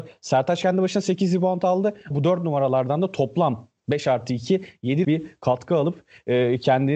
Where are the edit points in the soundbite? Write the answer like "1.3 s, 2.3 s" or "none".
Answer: 2.1 s, 5.0 s